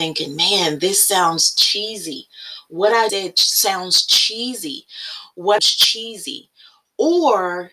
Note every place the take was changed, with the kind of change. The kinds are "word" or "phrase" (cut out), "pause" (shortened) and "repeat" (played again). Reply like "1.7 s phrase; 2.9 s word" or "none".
3.1 s word; 5.6 s phrase